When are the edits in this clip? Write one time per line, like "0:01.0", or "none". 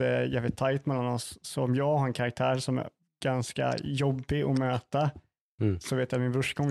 none

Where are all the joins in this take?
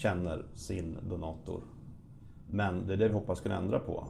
none

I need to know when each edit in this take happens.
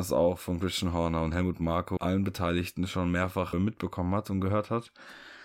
0:02.0
0:03.5

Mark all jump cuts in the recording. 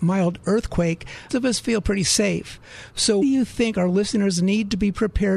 0:01.3
0:03.2

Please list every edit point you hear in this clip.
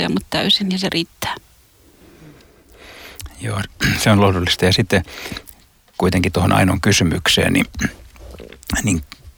0:06.3

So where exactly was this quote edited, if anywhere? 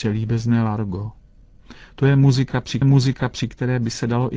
0:02.8

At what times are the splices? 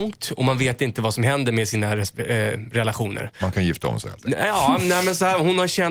none

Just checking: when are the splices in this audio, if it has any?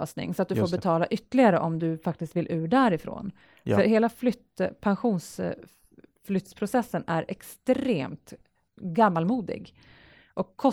0:08.7

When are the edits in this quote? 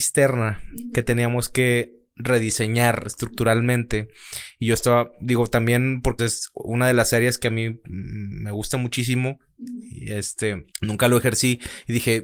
0:06.2
0:10.7

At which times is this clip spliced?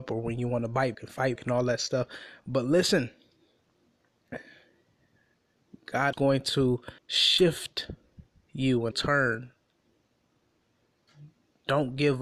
0:00.9
0:01.4
0:06.1
0:07.0
0:08.9

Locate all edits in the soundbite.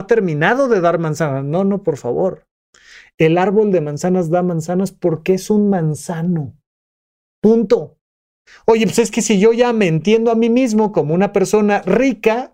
none

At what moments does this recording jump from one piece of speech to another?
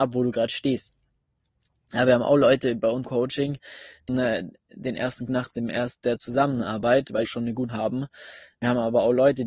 0:03.0
0:04.1
0:05.3
0:06.0
0:07.2
0:07.7

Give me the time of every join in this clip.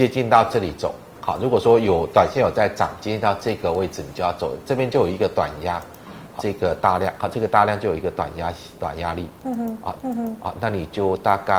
0:06.4
0:10.0

